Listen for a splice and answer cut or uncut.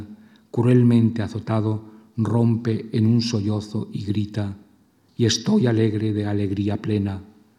uncut